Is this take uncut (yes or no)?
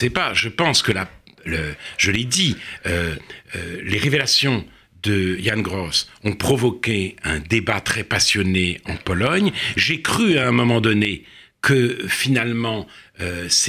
yes